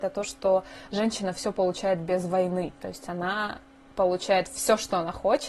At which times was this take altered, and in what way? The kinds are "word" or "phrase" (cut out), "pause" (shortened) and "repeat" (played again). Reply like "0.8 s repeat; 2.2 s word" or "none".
2.8 s pause